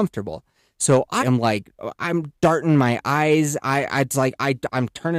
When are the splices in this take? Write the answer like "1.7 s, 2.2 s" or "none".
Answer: 1.2 s